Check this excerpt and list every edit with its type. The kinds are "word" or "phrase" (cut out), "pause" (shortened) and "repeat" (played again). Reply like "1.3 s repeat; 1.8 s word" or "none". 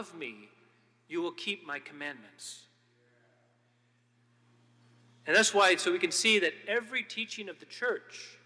none